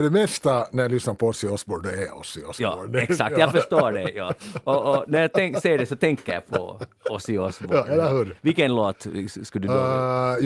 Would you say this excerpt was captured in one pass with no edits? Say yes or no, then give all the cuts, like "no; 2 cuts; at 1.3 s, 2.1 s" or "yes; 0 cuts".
yes; 0 cuts